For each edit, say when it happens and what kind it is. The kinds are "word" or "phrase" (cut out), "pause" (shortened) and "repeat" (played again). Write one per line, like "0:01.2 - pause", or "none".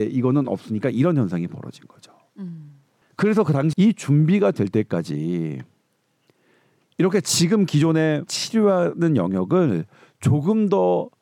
0:03.7 - word
0:08.3 - word